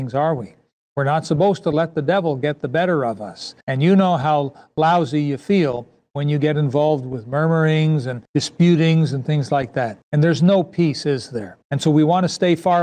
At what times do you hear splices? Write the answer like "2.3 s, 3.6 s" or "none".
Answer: 3.6 s, 8.3 s, 10.0 s, 11.6 s

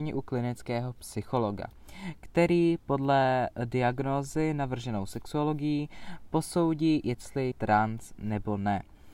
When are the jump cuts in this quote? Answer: 7.5 s

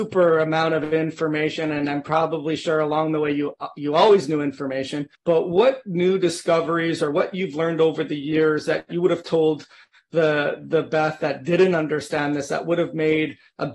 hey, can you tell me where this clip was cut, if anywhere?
5.1 s

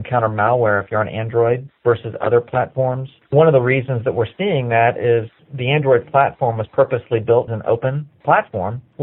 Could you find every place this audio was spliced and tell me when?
7.5 s

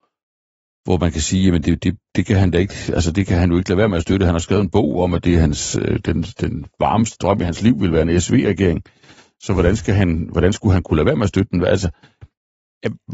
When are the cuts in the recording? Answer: none

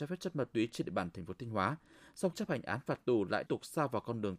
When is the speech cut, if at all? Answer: 2.3 s, 3.5 s

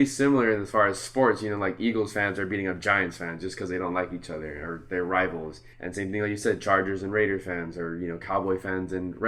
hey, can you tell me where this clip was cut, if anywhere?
5.7 s

